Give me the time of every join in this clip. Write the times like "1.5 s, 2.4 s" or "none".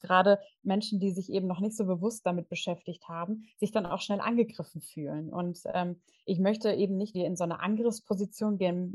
7.1 s